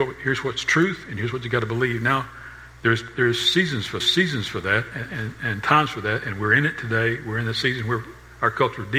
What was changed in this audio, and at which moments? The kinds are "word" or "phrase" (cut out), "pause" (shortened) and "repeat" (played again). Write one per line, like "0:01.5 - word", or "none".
0:04.0 - repeat